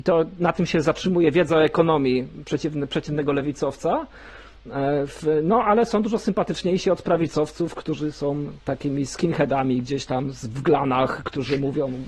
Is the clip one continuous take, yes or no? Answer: yes